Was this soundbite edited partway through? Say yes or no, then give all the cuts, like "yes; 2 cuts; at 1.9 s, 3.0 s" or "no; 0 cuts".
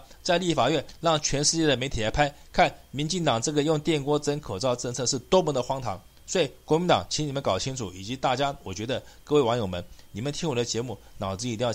no; 0 cuts